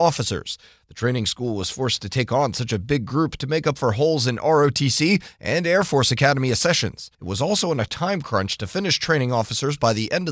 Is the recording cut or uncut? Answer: cut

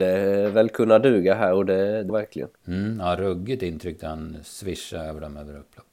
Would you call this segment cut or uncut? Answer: cut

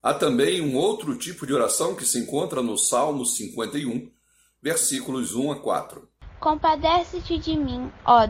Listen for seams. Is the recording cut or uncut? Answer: uncut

